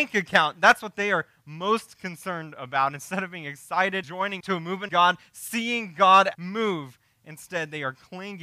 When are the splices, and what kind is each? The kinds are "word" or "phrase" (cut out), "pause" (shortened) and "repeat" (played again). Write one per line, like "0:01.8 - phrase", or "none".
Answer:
0:04.0 - word
0:04.4 - word
0:04.9 - word
0:06.3 - word